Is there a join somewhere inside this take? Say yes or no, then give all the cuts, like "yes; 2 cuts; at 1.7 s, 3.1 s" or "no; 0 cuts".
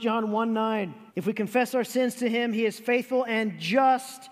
yes; 1 cut; at 1.1 s